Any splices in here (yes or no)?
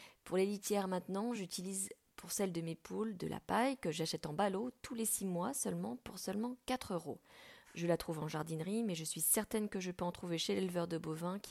no